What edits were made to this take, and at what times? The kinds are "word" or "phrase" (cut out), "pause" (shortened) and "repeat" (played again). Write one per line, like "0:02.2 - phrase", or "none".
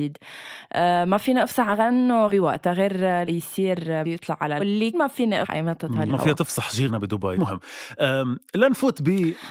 0:02.3 - word
0:03.2 - word
0:04.0 - word
0:04.6 - word
0:04.9 - word
0:05.4 - word
0:06.1 - word
0:06.9 - word
0:07.4 - word